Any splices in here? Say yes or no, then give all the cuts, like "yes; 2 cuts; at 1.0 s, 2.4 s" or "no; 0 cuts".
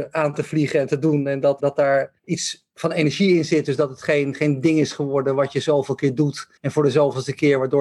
yes; 3 cuts; at 1.6 s, 2.2 s, 6.6 s